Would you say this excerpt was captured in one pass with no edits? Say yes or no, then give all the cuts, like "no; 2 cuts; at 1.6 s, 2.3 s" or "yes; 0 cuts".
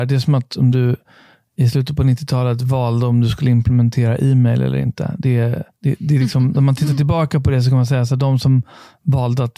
no; 1 cut; at 5.7 s